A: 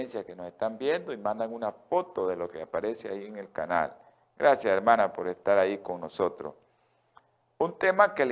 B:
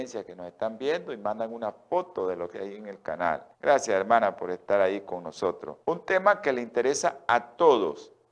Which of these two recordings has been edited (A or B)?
B